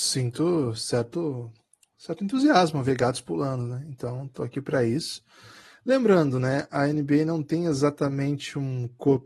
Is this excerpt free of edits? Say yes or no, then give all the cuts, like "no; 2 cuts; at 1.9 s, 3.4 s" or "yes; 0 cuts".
yes; 0 cuts